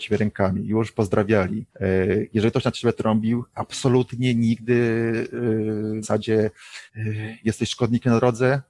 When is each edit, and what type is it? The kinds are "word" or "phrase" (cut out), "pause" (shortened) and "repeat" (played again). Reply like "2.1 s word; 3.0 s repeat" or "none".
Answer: 1.7 s pause; 6.0 s word; 6.9 s pause